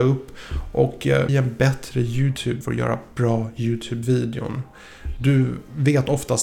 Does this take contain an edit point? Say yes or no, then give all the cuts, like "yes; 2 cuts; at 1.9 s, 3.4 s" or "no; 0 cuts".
yes; 2 cuts; at 1.3 s, 2.6 s